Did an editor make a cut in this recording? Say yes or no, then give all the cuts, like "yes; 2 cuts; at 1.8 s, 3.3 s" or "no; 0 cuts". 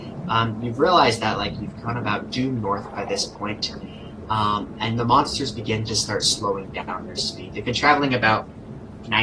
no; 0 cuts